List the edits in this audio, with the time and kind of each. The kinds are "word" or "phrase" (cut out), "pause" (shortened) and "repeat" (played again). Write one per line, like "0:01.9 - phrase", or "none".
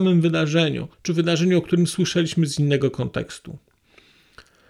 0:00.9 - pause